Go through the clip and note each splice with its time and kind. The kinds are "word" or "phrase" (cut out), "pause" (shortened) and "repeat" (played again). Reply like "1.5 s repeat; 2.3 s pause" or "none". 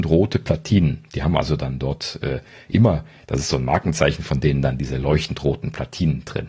none